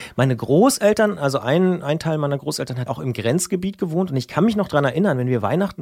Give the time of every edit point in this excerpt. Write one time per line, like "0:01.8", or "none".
0:02.9